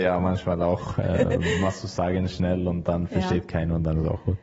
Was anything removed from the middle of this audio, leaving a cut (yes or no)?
no